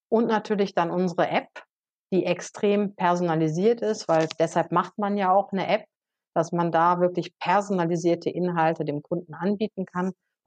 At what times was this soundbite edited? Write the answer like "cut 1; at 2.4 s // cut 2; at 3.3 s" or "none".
none